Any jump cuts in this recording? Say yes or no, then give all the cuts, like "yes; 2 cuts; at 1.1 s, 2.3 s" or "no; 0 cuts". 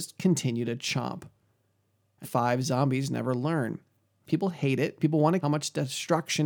yes; 4 cuts; at 2.2 s, 4.3 s, 5.0 s, 5.4 s